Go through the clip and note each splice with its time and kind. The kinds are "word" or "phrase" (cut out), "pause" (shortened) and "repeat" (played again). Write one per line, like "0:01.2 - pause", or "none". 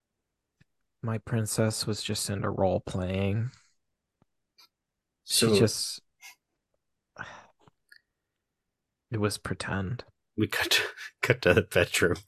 none